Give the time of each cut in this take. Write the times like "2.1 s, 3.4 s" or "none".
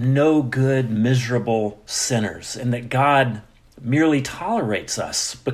none